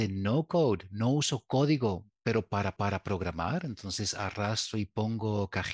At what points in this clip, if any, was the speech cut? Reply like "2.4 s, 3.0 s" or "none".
2.8 s